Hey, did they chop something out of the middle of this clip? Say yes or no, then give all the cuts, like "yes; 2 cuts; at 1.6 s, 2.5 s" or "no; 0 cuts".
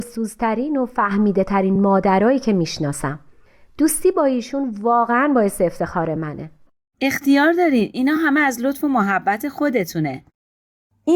no; 0 cuts